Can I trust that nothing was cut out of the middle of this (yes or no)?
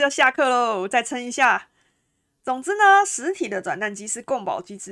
yes